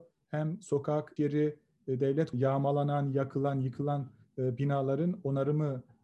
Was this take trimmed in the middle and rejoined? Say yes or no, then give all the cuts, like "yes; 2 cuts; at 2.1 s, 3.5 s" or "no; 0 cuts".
yes; 2 cuts; at 1.2 s, 2.3 s